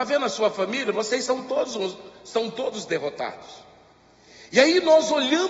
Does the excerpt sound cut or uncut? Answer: uncut